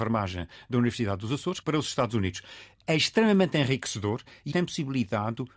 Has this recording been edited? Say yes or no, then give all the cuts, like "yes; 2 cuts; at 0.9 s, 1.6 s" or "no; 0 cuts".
yes; 2 cuts; at 1.6 s, 4.5 s